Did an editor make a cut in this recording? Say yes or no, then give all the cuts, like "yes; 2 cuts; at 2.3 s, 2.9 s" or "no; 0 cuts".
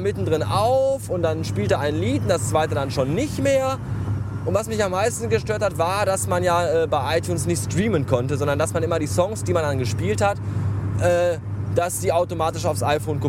no; 0 cuts